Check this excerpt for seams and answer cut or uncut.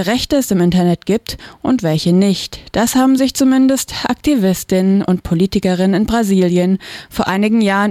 uncut